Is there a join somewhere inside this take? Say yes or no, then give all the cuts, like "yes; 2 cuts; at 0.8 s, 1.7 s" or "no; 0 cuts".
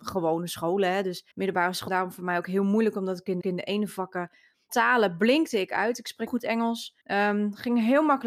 yes; 6 cuts; at 1.3 s, 1.9 s, 3.4 s, 4.7 s, 6.3 s, 7.0 s